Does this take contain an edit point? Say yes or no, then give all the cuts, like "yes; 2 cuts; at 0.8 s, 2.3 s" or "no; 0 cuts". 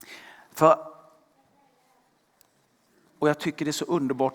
no; 0 cuts